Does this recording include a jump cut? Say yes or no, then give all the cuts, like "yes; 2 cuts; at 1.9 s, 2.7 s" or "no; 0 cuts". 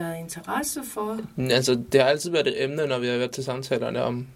no; 0 cuts